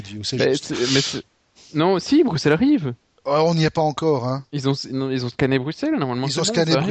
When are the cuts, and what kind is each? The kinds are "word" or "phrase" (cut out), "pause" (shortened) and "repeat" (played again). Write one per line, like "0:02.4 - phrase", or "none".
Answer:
none